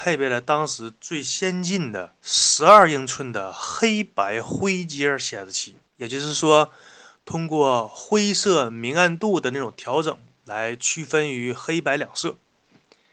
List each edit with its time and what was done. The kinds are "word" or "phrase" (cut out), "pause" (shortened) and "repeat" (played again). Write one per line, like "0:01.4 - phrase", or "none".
0:02.2 - pause
0:05.9 - pause